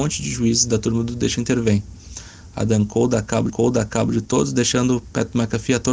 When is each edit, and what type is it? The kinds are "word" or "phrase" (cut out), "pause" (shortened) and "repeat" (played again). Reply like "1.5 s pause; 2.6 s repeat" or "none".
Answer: 1.4 s word; 3.5 s repeat